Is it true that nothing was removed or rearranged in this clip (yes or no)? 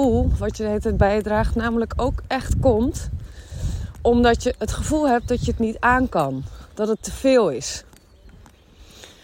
yes